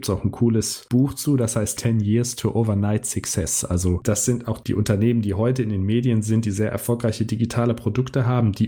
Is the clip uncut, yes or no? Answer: yes